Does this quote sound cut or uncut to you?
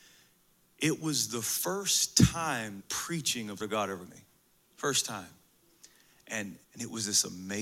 cut